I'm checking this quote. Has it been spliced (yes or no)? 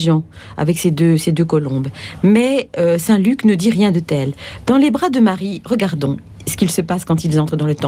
no